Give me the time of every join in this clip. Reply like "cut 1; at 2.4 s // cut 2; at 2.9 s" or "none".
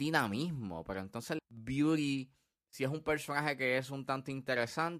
cut 1; at 1.4 s